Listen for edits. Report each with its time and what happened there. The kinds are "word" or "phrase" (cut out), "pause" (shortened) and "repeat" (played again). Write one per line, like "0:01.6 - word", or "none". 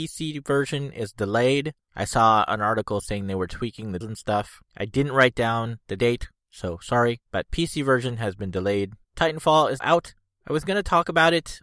0:01.8 - pause
0:04.0 - word
0:04.7 - pause
0:07.3 - pause
0:09.0 - pause
0:09.8 - word